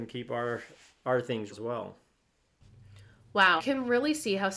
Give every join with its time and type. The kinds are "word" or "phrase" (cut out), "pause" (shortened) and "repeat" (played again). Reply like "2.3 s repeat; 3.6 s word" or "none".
1.5 s word; 3.6 s word